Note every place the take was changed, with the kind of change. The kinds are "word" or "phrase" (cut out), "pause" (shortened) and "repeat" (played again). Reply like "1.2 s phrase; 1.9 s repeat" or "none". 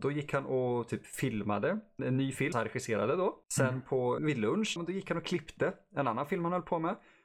2.0 s word; 2.5 s word; 3.4 s pause; 4.2 s word; 4.8 s phrase